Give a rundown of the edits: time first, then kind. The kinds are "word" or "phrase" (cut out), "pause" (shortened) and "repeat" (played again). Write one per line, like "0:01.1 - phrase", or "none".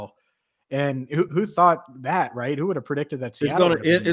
none